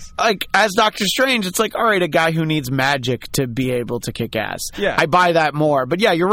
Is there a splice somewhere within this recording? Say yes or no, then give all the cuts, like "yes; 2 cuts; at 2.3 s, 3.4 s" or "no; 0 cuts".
no; 0 cuts